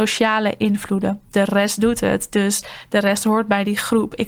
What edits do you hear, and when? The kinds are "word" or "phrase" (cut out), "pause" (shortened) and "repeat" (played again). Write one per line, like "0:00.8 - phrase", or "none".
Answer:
none